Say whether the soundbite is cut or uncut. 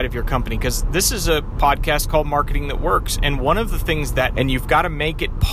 cut